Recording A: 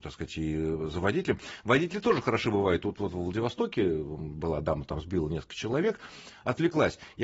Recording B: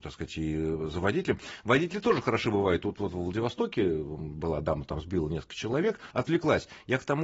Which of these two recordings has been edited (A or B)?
B